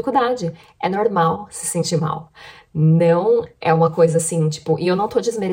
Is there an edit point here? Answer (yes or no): no